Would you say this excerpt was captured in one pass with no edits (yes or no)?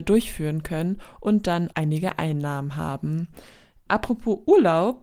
no